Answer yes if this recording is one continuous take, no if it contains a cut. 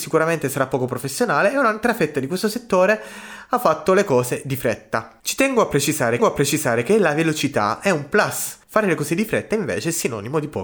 no